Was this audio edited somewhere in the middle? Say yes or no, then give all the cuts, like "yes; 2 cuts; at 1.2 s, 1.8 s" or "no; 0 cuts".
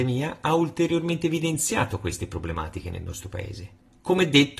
no; 0 cuts